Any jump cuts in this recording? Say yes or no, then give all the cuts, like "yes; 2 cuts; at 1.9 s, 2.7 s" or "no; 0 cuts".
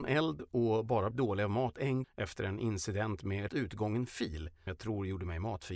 yes; 4 cuts; at 1.1 s, 2.0 s, 3.5 s, 4.7 s